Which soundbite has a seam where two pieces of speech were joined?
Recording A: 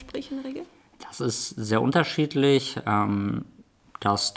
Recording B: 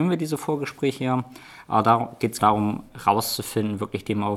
B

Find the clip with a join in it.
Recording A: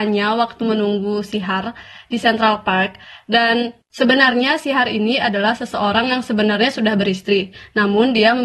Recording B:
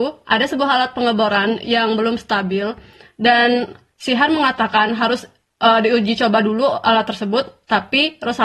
A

